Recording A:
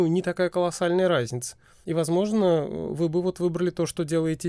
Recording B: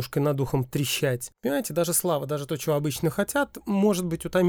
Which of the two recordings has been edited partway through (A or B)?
B